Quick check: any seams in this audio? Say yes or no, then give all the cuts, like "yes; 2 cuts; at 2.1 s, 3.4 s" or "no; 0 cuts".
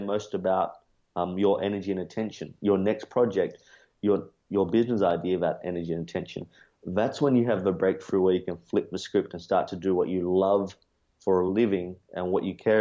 no; 0 cuts